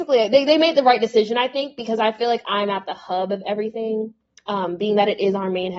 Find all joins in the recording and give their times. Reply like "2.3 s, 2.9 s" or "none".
none